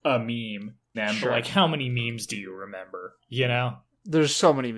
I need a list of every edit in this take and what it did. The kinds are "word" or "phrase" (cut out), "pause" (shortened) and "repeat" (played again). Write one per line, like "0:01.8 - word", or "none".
0:00.9 - word